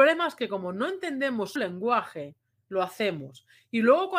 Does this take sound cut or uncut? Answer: cut